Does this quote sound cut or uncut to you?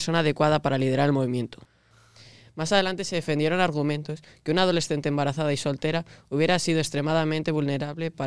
uncut